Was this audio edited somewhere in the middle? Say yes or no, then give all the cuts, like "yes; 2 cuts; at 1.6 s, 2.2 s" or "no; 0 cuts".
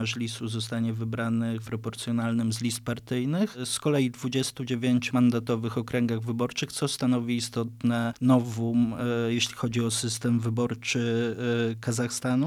yes; 2 cuts; at 1.7 s, 5.1 s